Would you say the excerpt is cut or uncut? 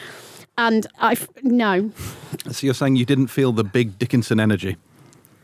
cut